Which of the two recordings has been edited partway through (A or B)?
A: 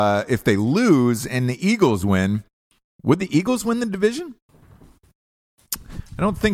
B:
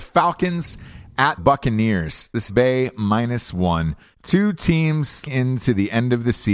B